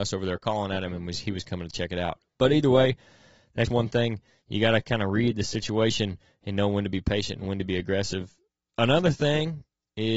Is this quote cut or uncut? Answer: cut